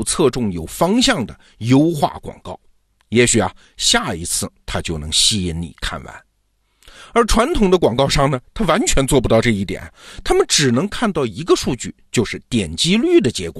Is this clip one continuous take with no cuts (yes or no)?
yes